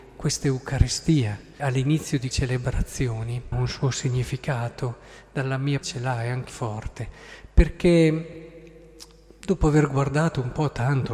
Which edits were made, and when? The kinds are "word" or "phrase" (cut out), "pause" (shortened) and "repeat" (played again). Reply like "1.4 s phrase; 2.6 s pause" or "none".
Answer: 1.6 s word; 2.3 s word; 3.5 s word; 5.8 s word; 6.5 s word